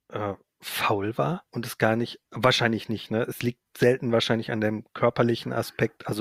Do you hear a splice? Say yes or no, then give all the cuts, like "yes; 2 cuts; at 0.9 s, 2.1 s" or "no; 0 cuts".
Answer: yes; 2 cuts; at 1.5 s, 2.3 s